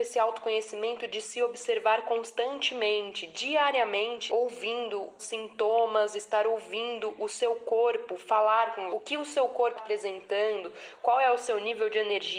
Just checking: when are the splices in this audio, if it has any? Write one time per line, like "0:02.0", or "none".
0:04.3
0:05.2
0:08.9
0:09.8